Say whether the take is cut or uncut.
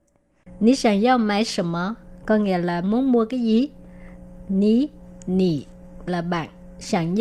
cut